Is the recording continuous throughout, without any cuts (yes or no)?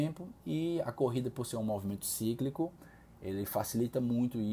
yes